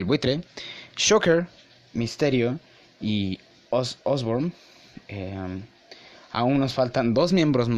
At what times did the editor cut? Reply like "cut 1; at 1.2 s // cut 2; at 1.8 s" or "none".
none